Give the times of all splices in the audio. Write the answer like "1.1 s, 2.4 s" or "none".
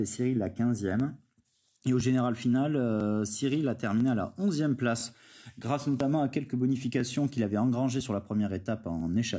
none